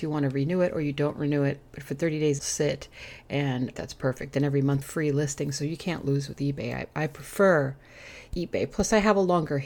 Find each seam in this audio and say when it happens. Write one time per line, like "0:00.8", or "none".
0:02.4
0:03.7
0:04.8